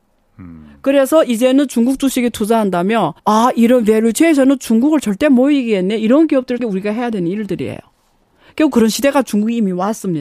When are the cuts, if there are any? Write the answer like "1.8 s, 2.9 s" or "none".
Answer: 3.2 s, 6.6 s